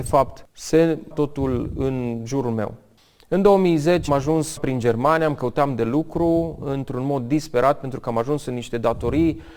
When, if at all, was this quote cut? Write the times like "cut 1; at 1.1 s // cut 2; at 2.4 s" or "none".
cut 1; at 1.1 s // cut 2; at 4.1 s // cut 3; at 4.6 s